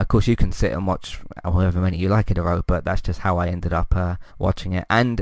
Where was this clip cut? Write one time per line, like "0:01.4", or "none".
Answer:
0:04.3